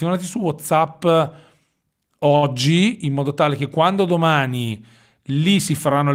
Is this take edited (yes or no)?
no